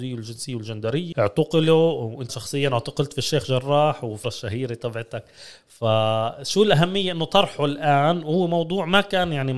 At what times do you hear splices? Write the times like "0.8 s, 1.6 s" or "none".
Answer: 1.1 s, 2.3 s, 4.2 s